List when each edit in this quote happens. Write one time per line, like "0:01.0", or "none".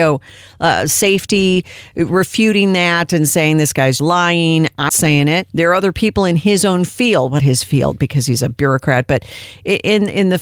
0:04.0
0:04.9
0:05.5
0:07.4